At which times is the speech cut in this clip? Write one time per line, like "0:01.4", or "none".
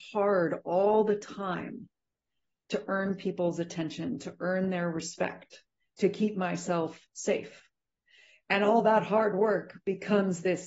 none